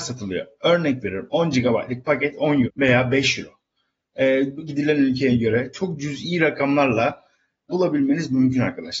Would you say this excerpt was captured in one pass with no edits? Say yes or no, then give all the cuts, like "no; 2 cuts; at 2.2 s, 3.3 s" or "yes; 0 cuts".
no; 3 cuts; at 2.6 s, 4.7 s, 7.7 s